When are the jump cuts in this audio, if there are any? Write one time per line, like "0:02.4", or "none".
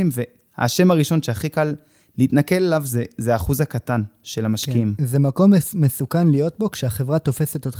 none